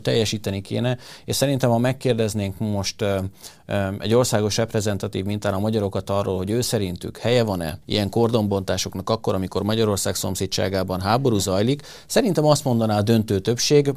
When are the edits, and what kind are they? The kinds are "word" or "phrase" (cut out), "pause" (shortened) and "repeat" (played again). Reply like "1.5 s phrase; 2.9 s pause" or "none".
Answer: 7.8 s pause